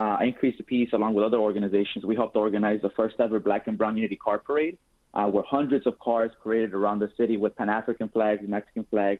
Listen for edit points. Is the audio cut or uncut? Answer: uncut